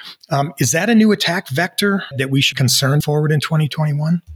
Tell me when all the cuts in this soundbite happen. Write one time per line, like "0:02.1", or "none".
0:02.1
0:02.5
0:03.0